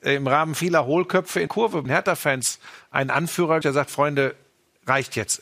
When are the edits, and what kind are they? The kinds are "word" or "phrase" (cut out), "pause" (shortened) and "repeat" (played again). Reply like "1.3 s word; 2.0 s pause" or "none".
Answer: 1.5 s word; 1.9 s word; 3.6 s word